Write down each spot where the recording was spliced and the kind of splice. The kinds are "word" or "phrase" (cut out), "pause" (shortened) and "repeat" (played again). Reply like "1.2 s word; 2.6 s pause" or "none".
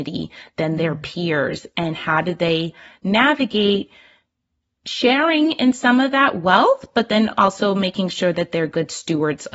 none